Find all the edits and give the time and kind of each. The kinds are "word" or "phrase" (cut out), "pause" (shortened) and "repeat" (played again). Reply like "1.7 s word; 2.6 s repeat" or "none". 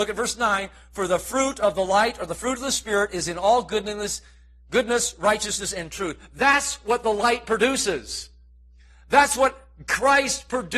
none